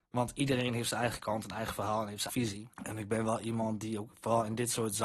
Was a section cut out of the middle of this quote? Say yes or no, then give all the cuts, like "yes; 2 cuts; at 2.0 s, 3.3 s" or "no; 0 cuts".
yes; 2 cuts; at 2.3 s, 2.7 s